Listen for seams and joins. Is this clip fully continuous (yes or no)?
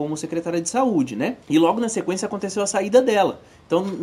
no